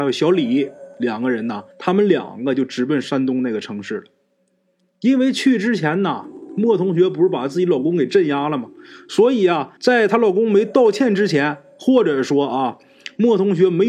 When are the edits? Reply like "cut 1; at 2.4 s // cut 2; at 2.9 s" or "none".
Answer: cut 1; at 1.7 s // cut 2; at 9.8 s